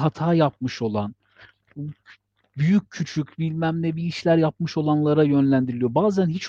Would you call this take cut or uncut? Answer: uncut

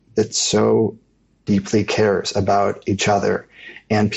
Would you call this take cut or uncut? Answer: uncut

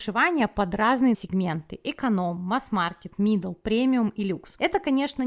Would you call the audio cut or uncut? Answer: cut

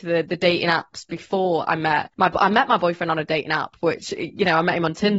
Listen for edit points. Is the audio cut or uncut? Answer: cut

